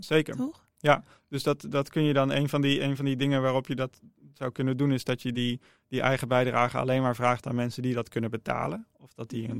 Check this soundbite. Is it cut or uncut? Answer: uncut